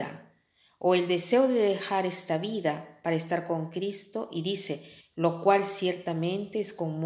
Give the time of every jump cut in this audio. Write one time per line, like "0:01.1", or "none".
0:05.0

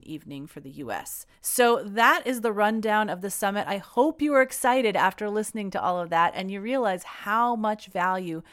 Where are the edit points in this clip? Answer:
0:01.3

